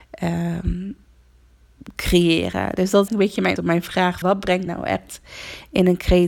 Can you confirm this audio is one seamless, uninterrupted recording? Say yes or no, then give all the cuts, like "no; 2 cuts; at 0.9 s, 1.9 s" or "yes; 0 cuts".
no; 4 cuts; at 3.1 s, 3.6 s, 4.2 s, 4.7 s